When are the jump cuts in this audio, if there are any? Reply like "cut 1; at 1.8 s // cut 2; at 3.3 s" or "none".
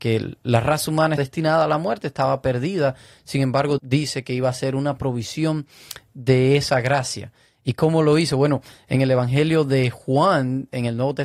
cut 1; at 1.2 s // cut 2; at 3.8 s